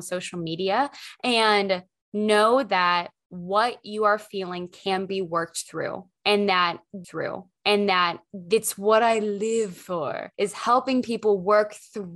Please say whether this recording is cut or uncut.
cut